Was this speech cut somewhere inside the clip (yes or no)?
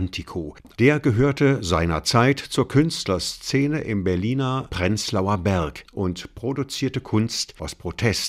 no